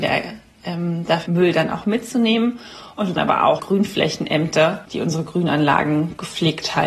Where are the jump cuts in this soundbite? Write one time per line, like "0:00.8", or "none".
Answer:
0:01.3
0:03.2
0:03.6